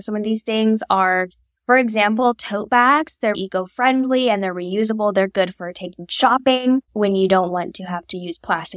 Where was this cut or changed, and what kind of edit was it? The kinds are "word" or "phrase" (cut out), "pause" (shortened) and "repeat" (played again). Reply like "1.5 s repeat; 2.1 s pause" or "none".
3.3 s word; 6.9 s pause